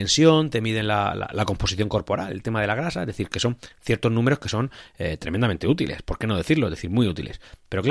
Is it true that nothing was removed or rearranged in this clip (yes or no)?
yes